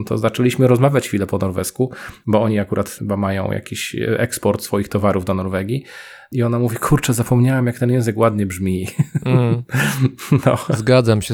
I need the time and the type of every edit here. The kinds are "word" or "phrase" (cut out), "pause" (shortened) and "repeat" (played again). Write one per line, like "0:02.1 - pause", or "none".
none